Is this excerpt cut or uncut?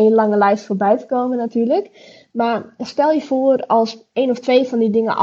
uncut